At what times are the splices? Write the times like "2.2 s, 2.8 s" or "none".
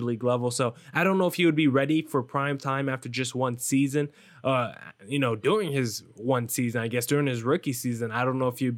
none